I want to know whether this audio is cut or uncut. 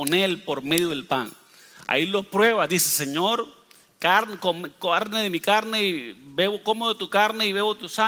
uncut